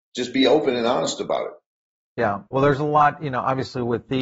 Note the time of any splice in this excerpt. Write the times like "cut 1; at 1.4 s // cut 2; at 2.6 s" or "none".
cut 1; at 2.5 s